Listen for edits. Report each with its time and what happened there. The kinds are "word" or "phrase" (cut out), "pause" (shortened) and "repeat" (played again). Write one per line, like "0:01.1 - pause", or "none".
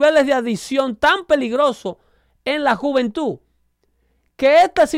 none